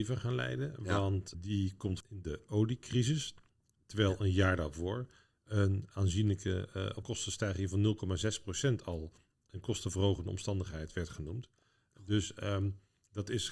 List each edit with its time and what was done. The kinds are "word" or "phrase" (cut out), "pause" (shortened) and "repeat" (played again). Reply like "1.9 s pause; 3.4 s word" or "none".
1.3 s word; 2.0 s phrase; 7.0 s word